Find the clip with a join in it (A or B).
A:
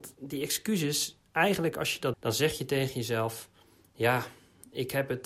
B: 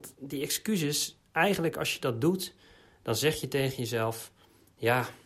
A